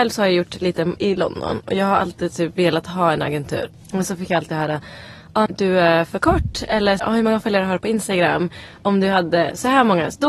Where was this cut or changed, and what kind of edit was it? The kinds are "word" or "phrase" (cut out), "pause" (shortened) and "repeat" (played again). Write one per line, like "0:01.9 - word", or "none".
0:01.0 - word
0:05.5 - word
0:07.0 - word